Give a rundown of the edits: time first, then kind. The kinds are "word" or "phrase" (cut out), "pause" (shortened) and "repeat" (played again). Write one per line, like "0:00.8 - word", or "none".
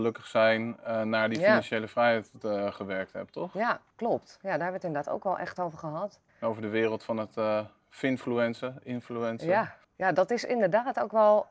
0:03.9 - pause
0:06.3 - pause
0:09.8 - pause